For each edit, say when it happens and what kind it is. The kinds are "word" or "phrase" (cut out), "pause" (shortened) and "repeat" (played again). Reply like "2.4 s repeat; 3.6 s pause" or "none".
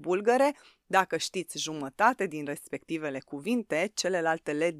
none